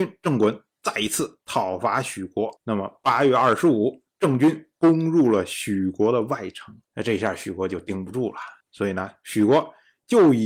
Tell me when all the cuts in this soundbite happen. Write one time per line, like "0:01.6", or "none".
0:02.6
0:06.8
0:08.6